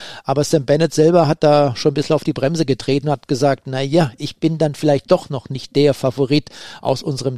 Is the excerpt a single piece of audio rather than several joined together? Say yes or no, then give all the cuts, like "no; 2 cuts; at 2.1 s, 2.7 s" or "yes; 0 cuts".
yes; 0 cuts